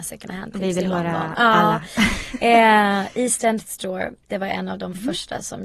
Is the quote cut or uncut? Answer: cut